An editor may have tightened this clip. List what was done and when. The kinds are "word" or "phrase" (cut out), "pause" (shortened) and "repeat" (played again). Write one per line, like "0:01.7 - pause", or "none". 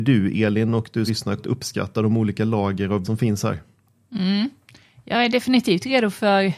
0:01.1 - word
0:01.4 - word
0:03.0 - word